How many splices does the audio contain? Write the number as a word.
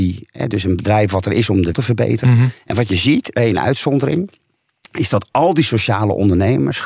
two